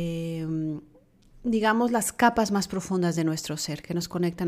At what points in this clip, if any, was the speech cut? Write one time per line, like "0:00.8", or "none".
none